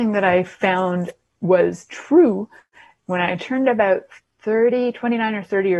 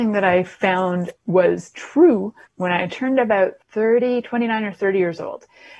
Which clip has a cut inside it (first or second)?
second